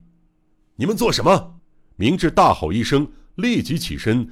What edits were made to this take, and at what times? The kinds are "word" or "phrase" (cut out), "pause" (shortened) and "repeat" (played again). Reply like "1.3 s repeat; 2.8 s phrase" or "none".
1.6 s pause